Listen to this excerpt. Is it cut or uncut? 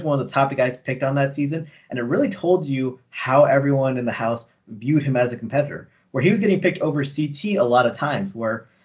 uncut